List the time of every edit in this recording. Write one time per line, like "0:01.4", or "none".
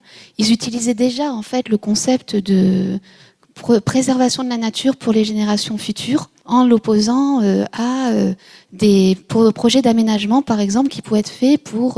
0:06.4